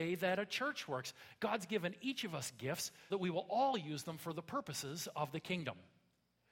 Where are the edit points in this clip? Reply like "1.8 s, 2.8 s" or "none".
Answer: 3.1 s